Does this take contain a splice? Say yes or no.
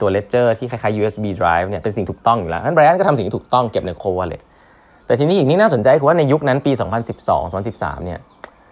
no